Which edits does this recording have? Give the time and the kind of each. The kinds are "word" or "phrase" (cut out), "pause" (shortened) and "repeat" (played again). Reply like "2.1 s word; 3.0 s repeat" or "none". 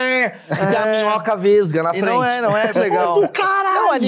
2.7 s word